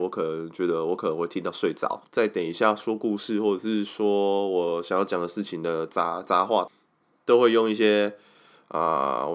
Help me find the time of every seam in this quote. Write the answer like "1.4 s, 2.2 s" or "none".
none